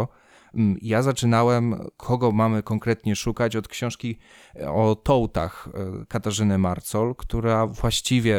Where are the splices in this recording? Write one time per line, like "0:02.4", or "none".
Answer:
none